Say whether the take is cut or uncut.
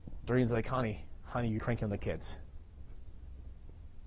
cut